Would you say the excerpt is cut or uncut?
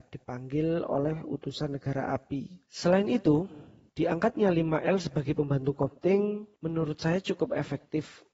uncut